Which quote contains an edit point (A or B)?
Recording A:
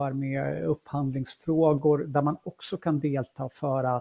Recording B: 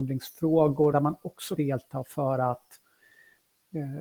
B